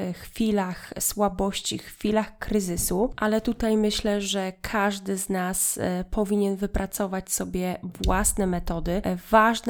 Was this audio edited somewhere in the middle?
no; 0 cuts

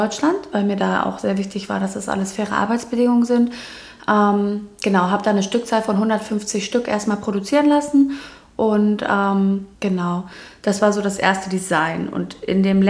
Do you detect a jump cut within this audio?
yes; 1 cut; at 9.8 s

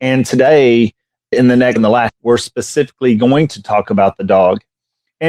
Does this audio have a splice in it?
yes; 3 cuts; at 1.3 s, 1.8 s, 2.1 s

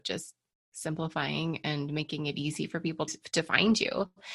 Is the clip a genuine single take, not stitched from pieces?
no; 1 cut; at 3.1 s

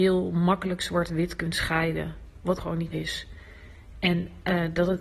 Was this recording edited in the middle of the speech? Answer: yes; 2 cuts; at 2.6 s, 2.9 s

